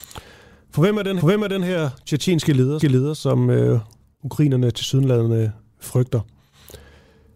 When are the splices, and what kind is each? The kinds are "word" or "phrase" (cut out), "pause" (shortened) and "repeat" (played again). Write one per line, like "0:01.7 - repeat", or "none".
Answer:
0:01.2 - repeat
0:02.8 - repeat